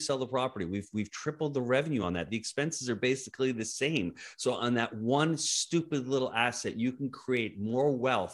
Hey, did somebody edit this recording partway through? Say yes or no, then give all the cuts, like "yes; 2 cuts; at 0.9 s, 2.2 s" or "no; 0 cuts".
no; 0 cuts